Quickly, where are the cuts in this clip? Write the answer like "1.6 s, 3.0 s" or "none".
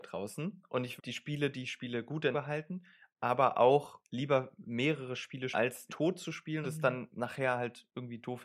1.0 s, 2.3 s, 4.0 s, 5.5 s, 5.9 s, 6.6 s